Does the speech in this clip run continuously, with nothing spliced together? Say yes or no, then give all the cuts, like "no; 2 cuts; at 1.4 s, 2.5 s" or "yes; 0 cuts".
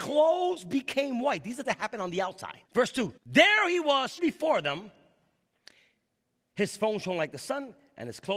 no; 4 cuts; at 1.6 s, 2.6 s, 3.2 s, 4.2 s